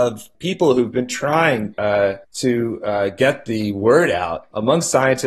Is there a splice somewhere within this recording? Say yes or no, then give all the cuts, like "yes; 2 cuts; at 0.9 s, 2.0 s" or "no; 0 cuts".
yes; 2 cuts; at 1.7 s, 2.2 s